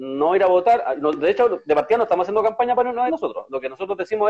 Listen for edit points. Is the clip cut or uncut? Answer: cut